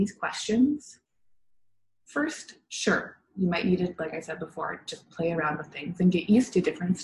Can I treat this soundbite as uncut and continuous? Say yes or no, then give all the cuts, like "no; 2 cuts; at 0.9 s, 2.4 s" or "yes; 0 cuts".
yes; 0 cuts